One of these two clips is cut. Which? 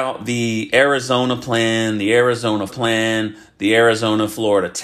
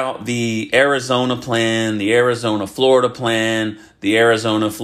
first; 1 cut; at 2.7 s

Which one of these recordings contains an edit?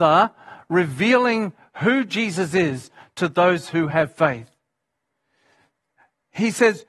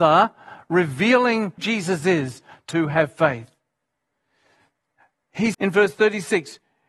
second; 3 cuts; at 1.6 s, 2.7 s, 5.5 s

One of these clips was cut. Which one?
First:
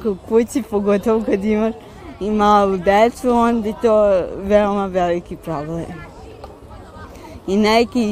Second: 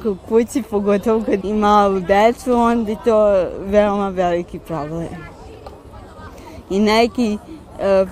second; 1 cut; at 1.4 s

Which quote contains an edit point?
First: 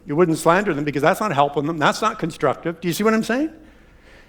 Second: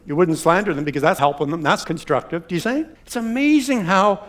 second; 4 cuts; at 1.2 s, 1.8 s, 2.6 s, 3.0 s

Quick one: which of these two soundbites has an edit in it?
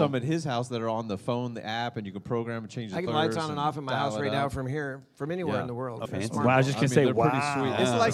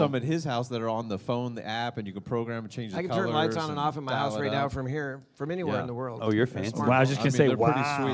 first; 2 cuts; at 3.1 s, 6.0 s

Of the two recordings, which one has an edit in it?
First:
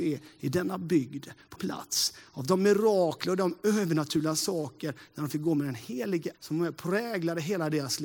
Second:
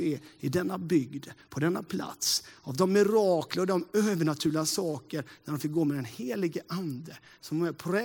first; 2 cuts; at 1.5 s, 6.3 s

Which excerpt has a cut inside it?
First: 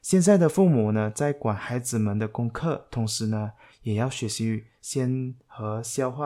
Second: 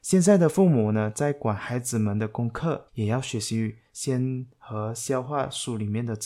second; 1 cut; at 2.9 s

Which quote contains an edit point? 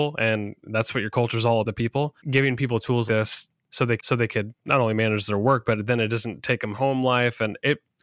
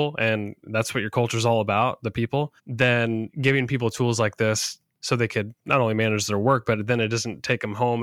first; 5 cuts; at 1.6 s, 2.2 s, 3.1 s, 4.0 s, 6.7 s

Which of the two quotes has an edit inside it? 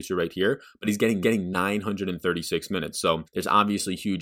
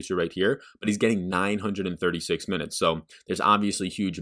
first; 2 cuts; at 1.2 s, 3.3 s

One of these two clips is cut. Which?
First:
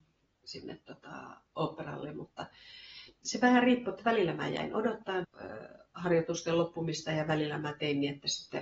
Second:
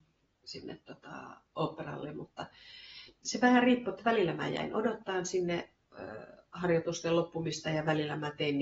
first; 1 cut; at 5.2 s

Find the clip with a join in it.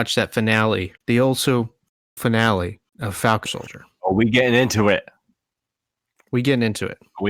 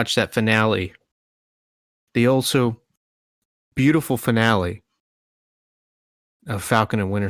first; 4 cuts; at 1.0 s, 2.2 s, 2.9 s, 3.5 s

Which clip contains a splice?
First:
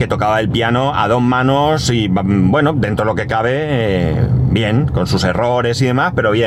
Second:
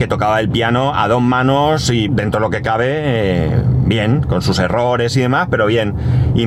second; 1 cut; at 2.1 s

